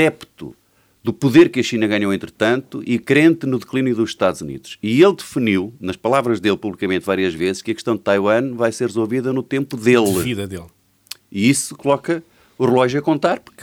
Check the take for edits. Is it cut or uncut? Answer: uncut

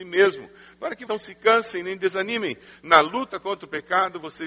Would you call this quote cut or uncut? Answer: cut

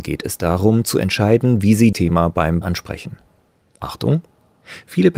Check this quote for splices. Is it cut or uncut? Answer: cut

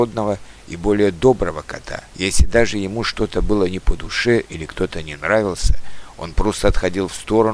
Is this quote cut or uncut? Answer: cut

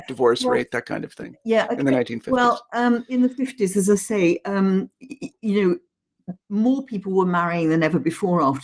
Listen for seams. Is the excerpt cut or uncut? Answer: uncut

